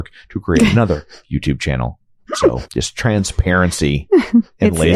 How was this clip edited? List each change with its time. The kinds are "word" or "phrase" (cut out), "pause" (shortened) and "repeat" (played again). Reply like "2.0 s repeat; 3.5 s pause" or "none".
2.7 s pause